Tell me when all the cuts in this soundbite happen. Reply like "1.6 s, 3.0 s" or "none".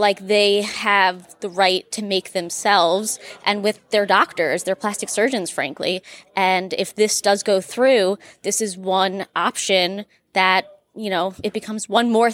none